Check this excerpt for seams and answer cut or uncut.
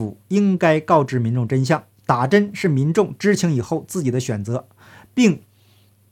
uncut